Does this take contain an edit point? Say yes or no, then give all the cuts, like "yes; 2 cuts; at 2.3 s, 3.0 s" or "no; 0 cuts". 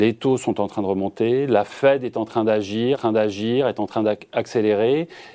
yes; 1 cut; at 2.9 s